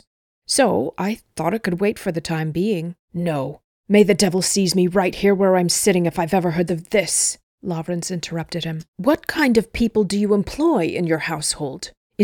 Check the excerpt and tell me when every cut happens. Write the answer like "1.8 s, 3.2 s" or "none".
6.7 s, 8.9 s